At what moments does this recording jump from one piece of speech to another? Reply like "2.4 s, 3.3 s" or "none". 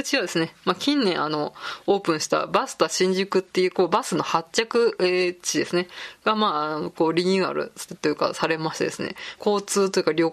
9.4 s